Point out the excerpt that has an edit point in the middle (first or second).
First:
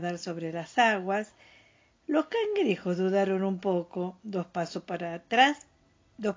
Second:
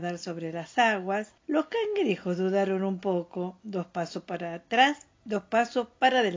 second